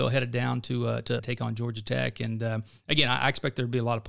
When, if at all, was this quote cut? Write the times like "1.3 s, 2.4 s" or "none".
1.2 s